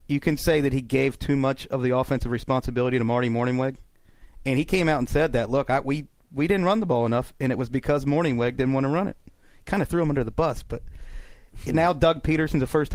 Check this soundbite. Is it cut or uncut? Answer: uncut